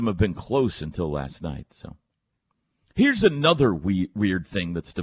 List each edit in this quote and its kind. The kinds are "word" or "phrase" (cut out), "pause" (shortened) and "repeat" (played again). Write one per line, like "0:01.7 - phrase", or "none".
none